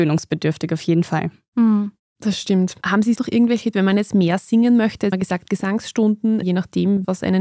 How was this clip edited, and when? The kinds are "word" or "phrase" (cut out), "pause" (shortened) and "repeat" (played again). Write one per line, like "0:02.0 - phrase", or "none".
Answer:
0:03.2 - word
0:03.7 - word
0:05.1 - word
0:06.4 - phrase